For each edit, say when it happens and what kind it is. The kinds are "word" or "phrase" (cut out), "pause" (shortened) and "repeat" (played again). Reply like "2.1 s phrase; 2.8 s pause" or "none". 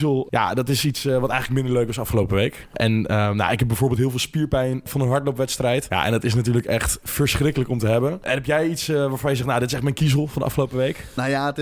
none

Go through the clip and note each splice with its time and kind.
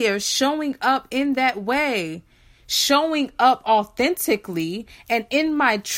none

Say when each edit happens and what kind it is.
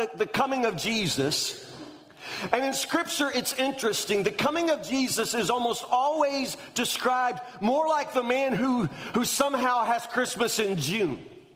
none

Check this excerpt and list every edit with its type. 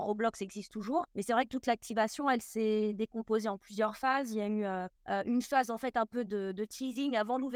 1.1 s pause; 5.0 s pause

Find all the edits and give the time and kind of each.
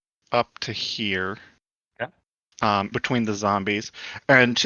2.9 s word

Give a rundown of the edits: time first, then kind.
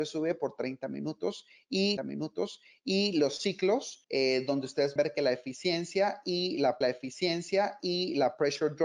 2.0 s repeat; 4.0 s pause; 5.0 s word; 6.8 s repeat

